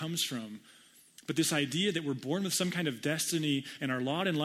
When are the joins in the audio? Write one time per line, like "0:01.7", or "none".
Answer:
none